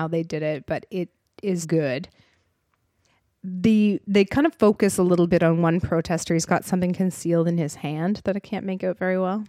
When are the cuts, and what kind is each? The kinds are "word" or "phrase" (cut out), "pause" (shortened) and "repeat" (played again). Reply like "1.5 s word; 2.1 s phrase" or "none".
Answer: 1.6 s word